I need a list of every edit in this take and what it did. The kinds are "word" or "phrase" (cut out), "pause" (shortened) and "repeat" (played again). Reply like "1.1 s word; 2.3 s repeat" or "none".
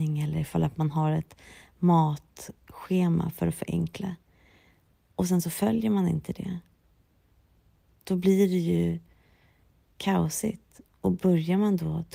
none

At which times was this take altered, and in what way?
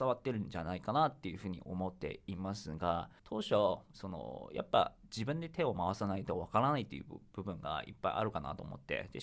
3.2 s pause

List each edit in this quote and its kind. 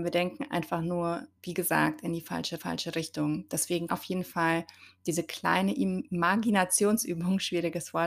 1.4 s pause; 2.6 s repeat; 3.9 s word

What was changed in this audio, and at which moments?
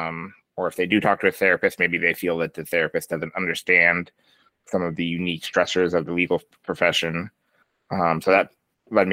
none

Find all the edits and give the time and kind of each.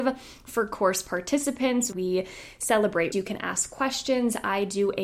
1.9 s word; 3.1 s word

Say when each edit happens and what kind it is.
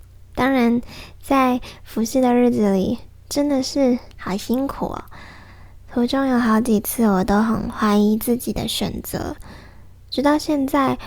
4.1 s pause

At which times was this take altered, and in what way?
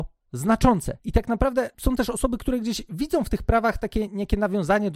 none

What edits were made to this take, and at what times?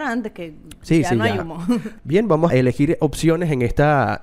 2.5 s word

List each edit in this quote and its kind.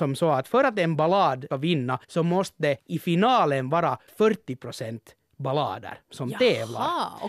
1.5 s word; 2.0 s pause; 2.8 s pause; 4.1 s word

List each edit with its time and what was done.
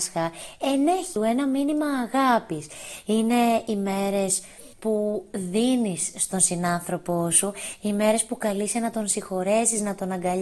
4.7 s pause

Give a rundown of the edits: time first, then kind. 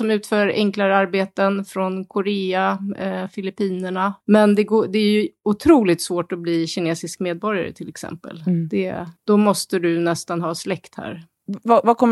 4.2 s pause; 9.2 s pause

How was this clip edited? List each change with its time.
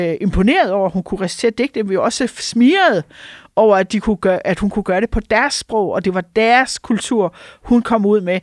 none

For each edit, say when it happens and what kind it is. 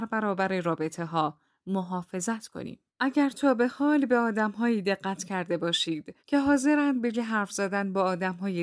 2.9 s pause; 6.2 s pause; 7.1 s word

